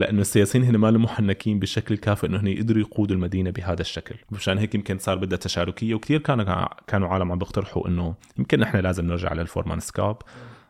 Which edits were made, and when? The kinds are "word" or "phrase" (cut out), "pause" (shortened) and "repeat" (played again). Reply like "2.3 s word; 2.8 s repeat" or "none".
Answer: 4.2 s pause